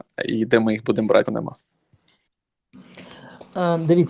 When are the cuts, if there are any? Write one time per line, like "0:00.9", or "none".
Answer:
0:01.3